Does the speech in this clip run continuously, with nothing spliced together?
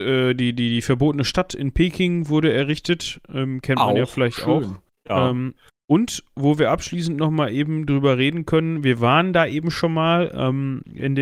yes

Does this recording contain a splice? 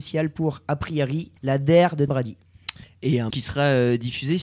yes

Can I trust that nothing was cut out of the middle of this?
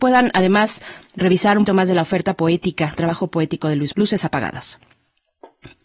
no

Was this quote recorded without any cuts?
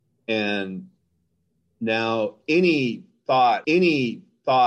no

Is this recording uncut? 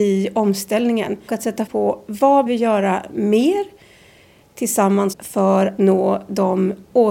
no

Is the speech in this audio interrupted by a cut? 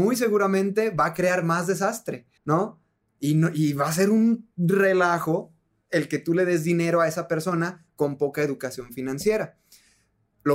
yes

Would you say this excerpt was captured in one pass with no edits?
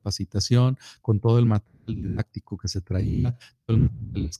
yes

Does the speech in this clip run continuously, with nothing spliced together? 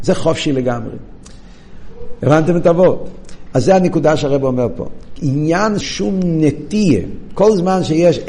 no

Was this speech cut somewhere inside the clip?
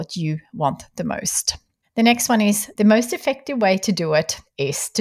no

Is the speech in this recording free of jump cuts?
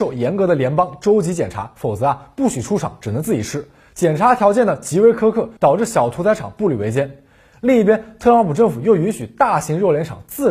no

